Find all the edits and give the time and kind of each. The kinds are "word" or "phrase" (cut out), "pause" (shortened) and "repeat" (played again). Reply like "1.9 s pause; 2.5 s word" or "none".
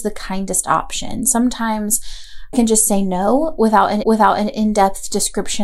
2.5 s word; 4.0 s repeat

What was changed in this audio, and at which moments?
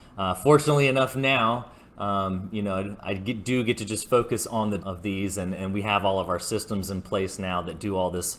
3.0 s word; 4.8 s word

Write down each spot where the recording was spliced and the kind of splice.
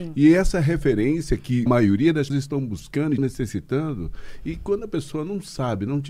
1.7 s word; 2.3 s word; 3.2 s word

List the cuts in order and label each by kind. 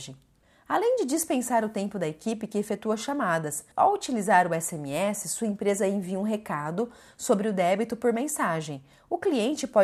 3.7 s pause

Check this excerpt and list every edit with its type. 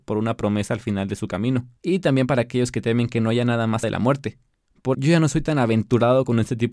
1.8 s pause; 3.8 s word; 4.9 s word

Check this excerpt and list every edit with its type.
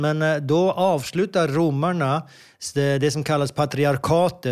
none

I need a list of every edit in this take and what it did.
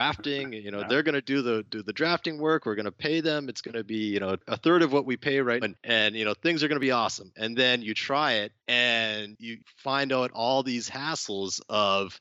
5.6 s word; 8.6 s pause

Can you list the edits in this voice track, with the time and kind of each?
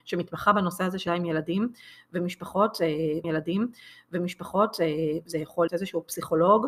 1.1 s word; 3.2 s repeat; 5.7 s word

